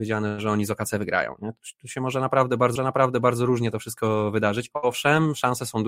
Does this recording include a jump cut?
yes; 1 cut; at 2.8 s

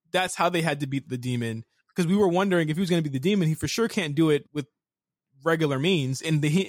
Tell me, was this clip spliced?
yes; 2 cuts; at 1.0 s, 4.4 s

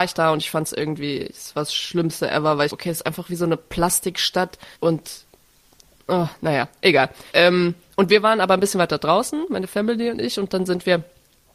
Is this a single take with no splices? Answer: no; 3 cuts; at 2.7 s, 4.7 s, 7.3 s

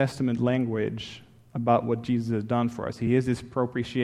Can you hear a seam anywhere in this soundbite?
no; 0 cuts

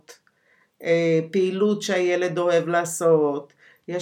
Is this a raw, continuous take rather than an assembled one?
yes; 0 cuts

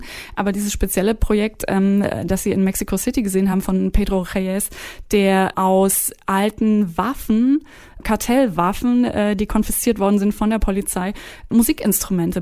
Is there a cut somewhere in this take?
no; 0 cuts

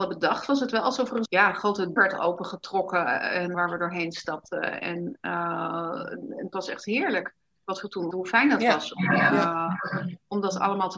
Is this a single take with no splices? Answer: no; 5 cuts; at 1.3 s, 2.0 s, 3.5 s, 6.5 s, 8.1 s

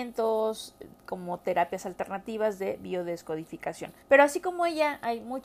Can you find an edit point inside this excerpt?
yes; 1 cut; at 4.0 s

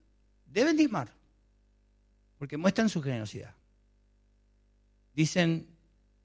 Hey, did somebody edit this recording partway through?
no; 0 cuts

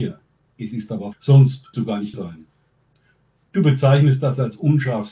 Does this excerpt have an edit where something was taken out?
yes; 3 cuts; at 1.1 s, 1.7 s, 2.1 s

